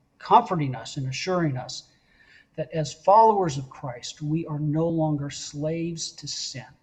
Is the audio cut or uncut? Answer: uncut